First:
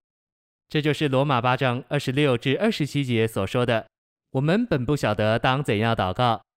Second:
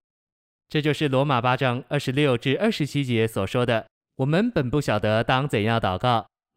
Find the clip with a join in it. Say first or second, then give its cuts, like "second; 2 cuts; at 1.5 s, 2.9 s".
second; 1 cut; at 3.9 s